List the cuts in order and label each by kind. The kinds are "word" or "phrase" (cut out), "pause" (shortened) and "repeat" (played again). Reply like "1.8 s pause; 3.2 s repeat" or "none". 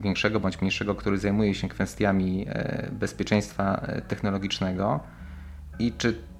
none